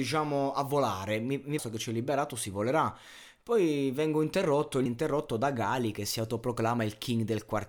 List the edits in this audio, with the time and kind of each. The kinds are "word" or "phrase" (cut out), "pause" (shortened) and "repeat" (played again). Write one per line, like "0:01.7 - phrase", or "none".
0:01.6 - phrase
0:04.9 - phrase